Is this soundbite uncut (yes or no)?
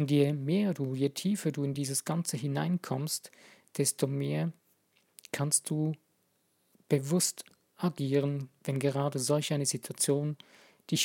yes